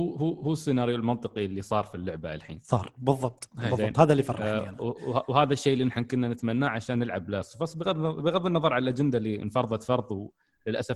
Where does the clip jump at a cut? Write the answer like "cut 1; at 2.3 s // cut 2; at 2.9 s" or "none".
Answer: none